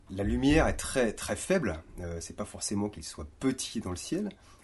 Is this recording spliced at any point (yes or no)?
no